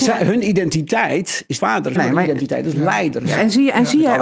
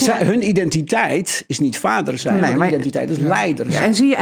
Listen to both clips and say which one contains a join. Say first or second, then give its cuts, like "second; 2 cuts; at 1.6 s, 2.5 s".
first; 2 cuts; at 1.6 s, 2.0 s